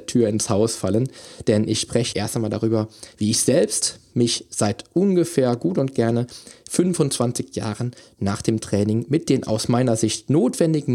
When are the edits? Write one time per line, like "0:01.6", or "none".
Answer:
0:02.1